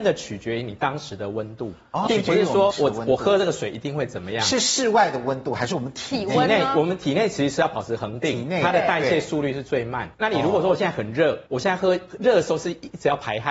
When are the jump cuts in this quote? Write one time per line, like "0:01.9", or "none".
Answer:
0:02.1
0:02.7
0:10.1
0:11.5